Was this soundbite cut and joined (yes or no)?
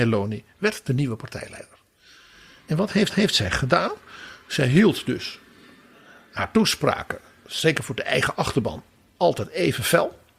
yes